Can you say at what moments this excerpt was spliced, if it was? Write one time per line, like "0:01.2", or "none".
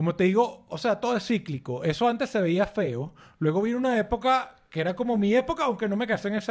none